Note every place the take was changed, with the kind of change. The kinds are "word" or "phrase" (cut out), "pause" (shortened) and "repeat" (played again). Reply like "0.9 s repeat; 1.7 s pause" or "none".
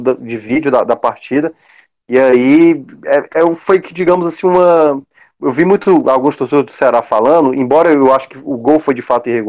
none